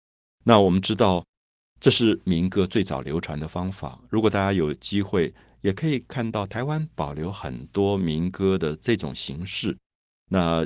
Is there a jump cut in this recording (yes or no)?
no